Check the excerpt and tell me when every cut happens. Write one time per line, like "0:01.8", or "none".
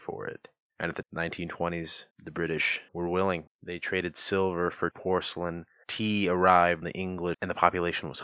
0:01.0
0:02.1
0:02.9
0:03.5
0:04.9
0:06.8
0:07.3